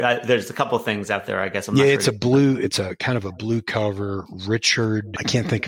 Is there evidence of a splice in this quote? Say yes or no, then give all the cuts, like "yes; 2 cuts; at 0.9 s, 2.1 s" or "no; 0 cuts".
no; 0 cuts